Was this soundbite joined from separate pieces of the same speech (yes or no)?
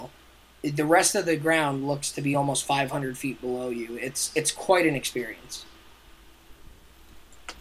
no